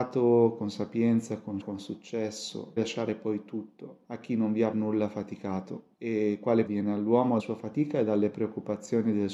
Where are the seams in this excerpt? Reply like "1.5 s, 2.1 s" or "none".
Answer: 1.6 s, 2.8 s, 4.0 s, 4.7 s, 5.9 s, 6.7 s, 7.4 s